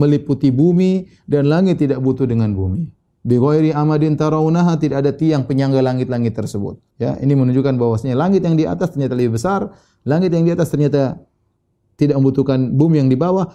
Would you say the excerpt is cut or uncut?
cut